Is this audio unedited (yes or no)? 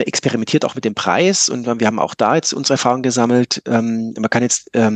yes